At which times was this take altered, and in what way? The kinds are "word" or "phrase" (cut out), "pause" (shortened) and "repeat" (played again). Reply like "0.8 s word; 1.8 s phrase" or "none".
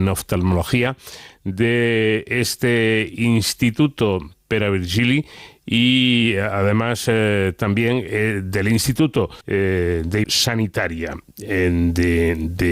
9.4 s pause; 10.2 s word